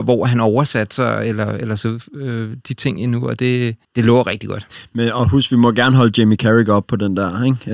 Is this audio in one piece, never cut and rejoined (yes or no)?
no